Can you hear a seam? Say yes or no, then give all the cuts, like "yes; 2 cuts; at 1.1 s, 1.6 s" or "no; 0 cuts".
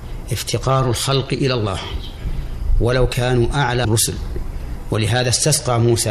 yes; 1 cut; at 3.8 s